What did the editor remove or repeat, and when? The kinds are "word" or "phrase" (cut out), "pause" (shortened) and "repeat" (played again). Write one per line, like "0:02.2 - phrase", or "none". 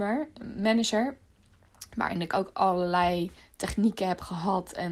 0:03.4 - pause